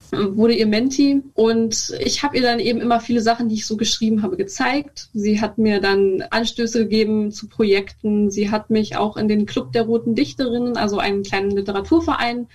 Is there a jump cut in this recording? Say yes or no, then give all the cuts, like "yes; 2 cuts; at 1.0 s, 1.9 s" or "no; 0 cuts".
yes; 1 cut; at 1.3 s